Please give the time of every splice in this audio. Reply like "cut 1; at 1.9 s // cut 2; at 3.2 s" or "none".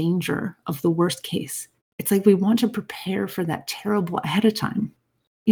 cut 1; at 1.8 s // cut 2; at 4.2 s